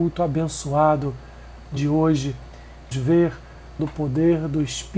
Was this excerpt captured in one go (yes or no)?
no